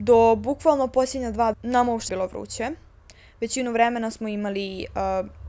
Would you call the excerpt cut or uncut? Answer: cut